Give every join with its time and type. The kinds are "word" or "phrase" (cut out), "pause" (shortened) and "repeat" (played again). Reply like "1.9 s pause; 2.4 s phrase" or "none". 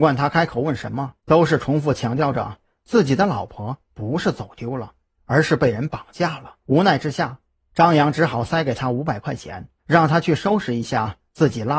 1.2 s pause; 6.6 s pause; 9.8 s pause